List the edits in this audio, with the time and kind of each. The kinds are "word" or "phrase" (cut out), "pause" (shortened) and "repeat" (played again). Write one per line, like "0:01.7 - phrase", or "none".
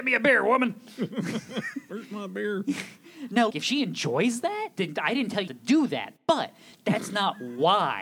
0:03.5 - word
0:04.7 - word
0:05.5 - word